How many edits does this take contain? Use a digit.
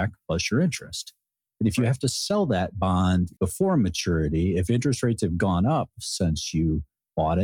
1